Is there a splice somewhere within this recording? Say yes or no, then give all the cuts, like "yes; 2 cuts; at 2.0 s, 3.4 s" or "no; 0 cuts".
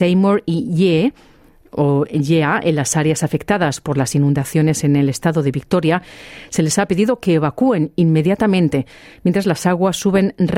no; 0 cuts